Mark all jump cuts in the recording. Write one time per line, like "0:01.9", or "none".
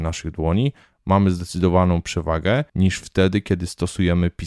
0:02.7